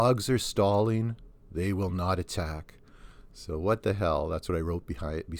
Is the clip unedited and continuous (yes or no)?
yes